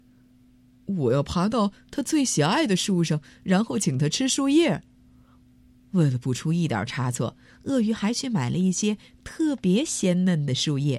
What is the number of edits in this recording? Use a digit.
0